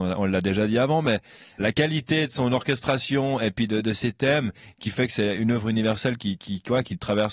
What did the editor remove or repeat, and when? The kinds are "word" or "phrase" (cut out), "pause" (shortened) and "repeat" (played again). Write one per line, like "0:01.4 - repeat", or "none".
0:01.6 - word